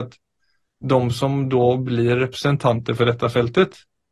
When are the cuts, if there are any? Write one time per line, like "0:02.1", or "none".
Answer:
none